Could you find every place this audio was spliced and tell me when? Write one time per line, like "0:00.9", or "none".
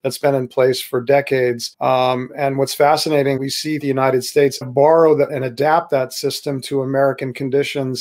0:01.7
0:03.4
0:03.8
0:04.6
0:05.3